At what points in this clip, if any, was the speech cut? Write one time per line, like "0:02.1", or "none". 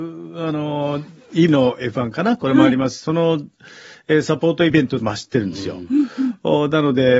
0:01.5
0:05.0